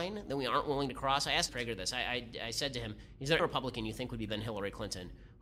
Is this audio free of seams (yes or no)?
no